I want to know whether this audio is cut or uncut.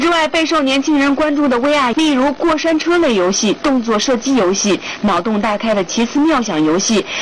cut